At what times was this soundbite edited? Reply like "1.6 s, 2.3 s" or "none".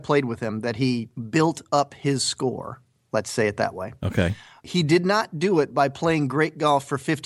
none